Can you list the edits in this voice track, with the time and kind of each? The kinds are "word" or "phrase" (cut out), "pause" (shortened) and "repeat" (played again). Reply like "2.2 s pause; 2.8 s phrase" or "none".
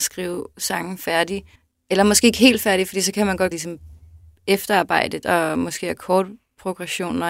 1.6 s pause; 3.5 s phrase; 5.2 s word